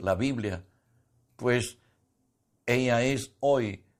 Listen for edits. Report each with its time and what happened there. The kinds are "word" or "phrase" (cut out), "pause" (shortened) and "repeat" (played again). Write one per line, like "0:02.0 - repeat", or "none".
none